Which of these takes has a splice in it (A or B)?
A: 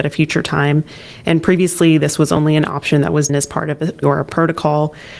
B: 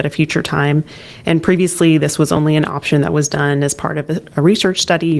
A